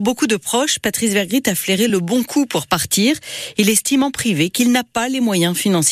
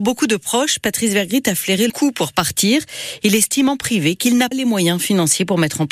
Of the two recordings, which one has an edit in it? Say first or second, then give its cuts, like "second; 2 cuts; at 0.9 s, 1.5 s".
second; 2 cuts; at 1.9 s, 4.5 s